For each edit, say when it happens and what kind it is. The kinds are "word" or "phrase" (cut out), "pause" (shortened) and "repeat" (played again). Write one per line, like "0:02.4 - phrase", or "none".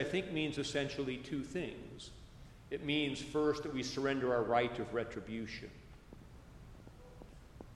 none